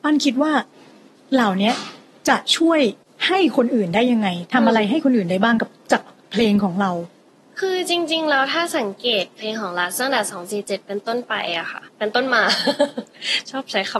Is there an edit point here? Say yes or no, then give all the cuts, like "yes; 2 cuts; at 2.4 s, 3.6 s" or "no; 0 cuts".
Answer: yes; 1 cut; at 11.9 s